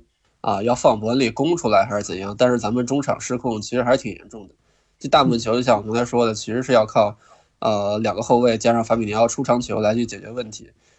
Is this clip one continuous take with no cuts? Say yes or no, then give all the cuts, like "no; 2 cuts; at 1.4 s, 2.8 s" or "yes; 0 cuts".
yes; 0 cuts